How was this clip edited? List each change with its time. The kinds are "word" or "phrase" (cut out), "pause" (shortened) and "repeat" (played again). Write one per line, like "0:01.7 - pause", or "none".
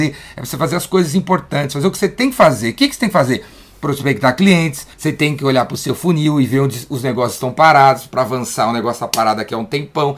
0:04.9 - pause